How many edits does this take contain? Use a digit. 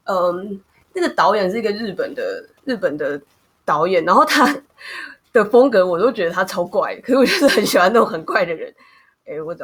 1